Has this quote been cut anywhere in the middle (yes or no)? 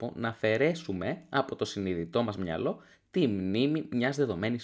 no